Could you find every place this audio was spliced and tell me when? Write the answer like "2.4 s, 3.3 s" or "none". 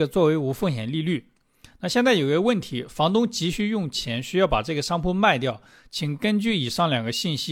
none